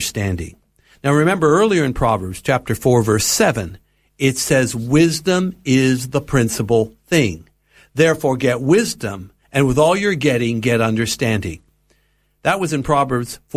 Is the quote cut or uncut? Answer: uncut